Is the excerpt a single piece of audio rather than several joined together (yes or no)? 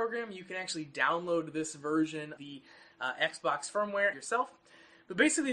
no